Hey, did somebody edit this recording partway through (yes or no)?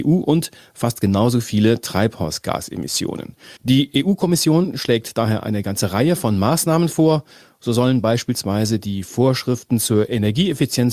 yes